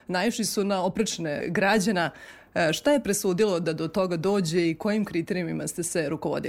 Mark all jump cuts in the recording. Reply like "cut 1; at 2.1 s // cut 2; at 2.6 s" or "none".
cut 1; at 1.4 s